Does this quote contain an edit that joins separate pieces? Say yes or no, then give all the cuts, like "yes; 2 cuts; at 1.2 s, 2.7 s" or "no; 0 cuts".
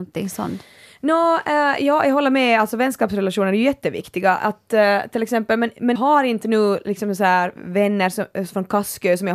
yes; 1 cut; at 6.0 s